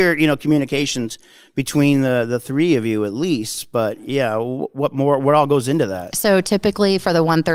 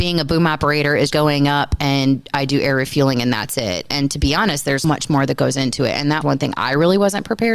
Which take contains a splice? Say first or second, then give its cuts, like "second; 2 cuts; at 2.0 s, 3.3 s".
second; 3 cuts; at 1.1 s, 4.8 s, 6.2 s